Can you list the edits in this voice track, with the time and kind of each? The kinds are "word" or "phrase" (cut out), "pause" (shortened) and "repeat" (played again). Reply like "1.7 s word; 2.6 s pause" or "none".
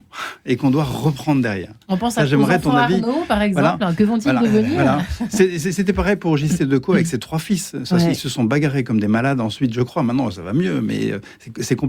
1.8 s pause